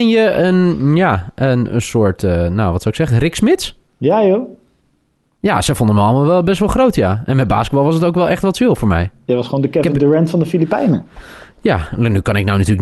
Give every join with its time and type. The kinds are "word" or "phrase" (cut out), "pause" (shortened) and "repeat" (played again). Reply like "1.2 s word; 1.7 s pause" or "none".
none